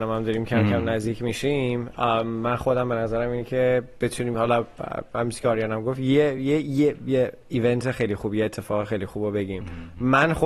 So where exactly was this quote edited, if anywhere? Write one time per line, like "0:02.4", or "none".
none